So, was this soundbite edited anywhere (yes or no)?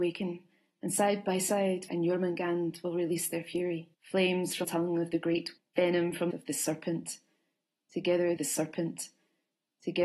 yes